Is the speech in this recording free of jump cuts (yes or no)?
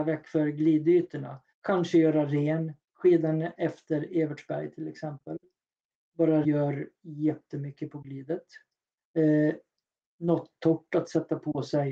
no